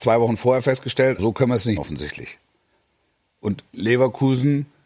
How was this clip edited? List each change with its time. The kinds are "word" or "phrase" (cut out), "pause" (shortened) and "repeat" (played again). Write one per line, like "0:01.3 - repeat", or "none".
0:01.2 - word
0:01.8 - word